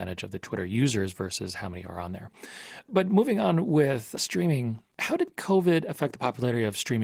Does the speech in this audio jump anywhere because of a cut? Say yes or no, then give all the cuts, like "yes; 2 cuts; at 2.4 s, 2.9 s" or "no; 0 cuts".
no; 0 cuts